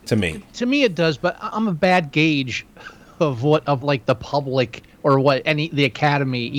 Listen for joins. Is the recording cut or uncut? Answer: cut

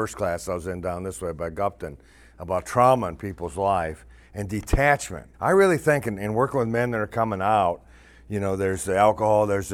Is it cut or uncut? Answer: cut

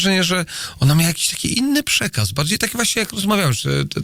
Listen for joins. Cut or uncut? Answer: uncut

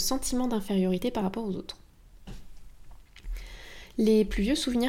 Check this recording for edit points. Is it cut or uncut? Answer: uncut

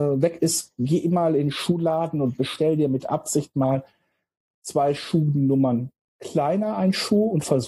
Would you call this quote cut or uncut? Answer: uncut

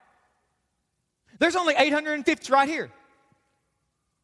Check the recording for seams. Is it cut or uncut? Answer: cut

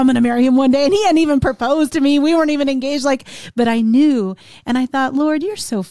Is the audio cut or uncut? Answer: uncut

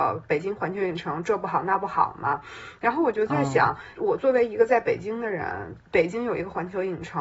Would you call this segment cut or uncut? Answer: uncut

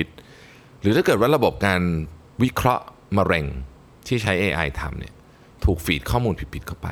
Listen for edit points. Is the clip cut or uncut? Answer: uncut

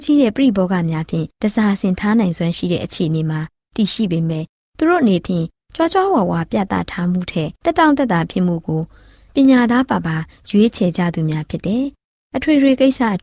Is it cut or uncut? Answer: cut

